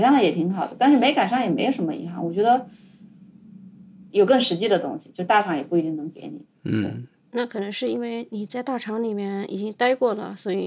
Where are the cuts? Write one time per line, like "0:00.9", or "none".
0:04.1